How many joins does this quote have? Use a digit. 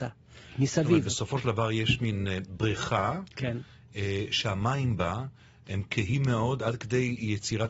0